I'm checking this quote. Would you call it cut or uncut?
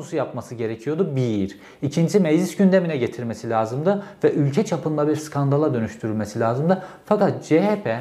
uncut